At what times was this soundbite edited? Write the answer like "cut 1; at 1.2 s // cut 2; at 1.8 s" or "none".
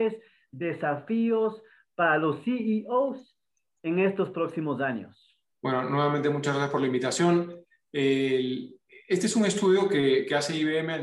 cut 1; at 5.5 s